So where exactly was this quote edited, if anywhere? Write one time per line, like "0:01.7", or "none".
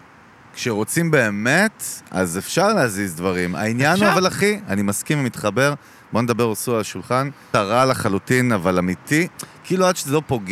0:07.5